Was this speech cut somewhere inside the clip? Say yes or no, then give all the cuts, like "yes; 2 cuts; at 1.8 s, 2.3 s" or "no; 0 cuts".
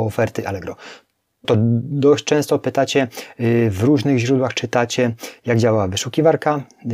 yes; 1 cut; at 1.4 s